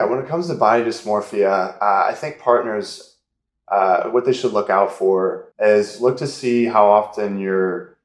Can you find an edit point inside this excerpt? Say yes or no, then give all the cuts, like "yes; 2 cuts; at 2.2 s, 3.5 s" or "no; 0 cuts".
yes; 1 cut; at 5.5 s